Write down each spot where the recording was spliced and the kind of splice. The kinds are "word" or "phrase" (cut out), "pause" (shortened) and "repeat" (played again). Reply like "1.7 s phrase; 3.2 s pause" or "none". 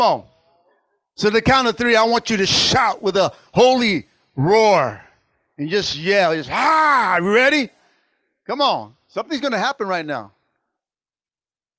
none